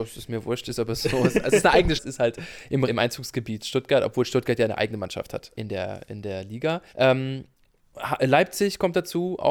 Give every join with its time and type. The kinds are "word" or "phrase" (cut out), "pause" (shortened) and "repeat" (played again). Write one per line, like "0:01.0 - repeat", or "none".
0:02.0 - phrase
0:02.9 - word
0:05.5 - word
0:06.9 - pause